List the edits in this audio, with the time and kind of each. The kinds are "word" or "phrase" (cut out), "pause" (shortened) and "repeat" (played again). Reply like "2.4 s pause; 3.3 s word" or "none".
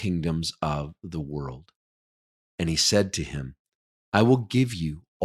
none

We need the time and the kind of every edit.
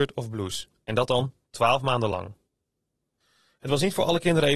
none

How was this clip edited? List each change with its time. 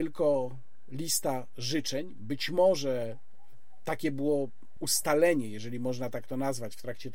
4.8 s word

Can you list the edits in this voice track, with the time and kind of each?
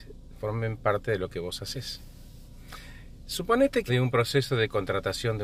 3.9 s word

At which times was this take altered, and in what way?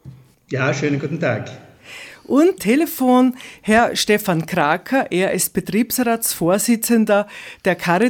2.6 s word

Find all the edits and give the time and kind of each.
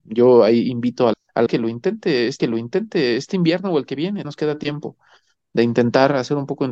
1.1 s word; 1.5 s word; 2.4 s repeat; 4.2 s word

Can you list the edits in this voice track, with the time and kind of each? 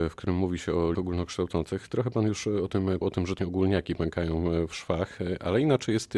0.9 s word; 3.0 s word; 3.4 s word

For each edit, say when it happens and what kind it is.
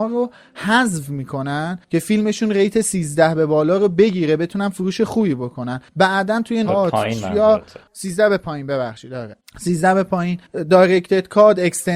6.6 s phrase

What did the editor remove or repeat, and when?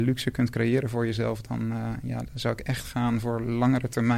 none

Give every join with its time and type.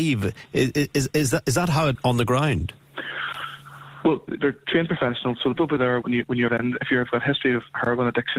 1.1 s word; 1.9 s word; 4.3 s word; 5.6 s word; 6.0 s word; 6.5 s word

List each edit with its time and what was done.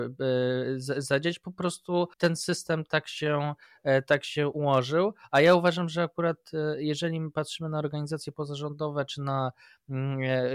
2.1 s pause

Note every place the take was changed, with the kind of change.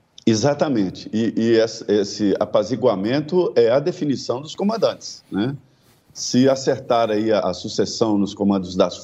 7.4 s word

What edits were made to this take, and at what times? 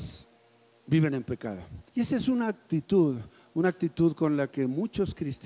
1.9 s pause

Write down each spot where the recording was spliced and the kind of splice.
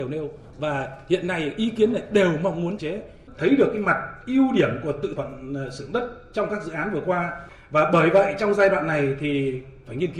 2.8 s word; 3.4 s word; 5.2 s word

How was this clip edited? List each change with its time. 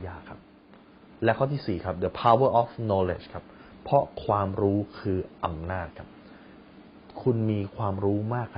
none

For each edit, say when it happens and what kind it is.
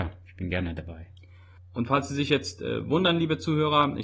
none

